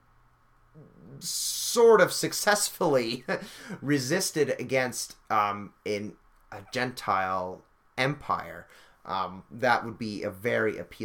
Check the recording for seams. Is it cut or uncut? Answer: uncut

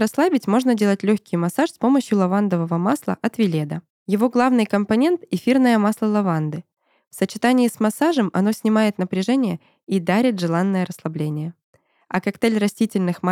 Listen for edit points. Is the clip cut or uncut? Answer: uncut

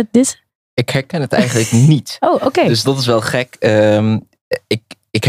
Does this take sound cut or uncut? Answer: uncut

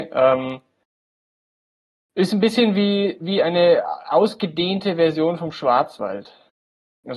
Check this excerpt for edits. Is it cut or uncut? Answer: uncut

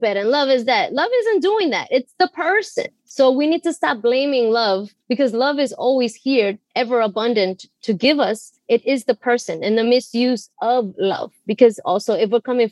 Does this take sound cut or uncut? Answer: cut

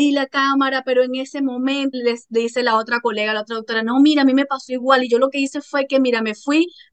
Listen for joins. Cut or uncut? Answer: cut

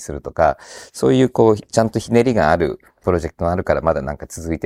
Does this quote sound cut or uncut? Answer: cut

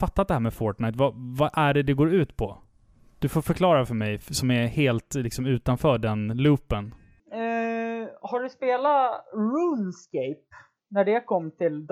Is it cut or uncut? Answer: uncut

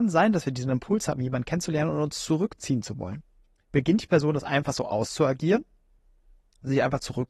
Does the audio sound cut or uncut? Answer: uncut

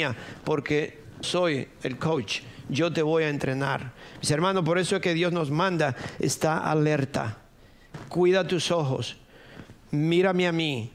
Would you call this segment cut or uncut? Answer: cut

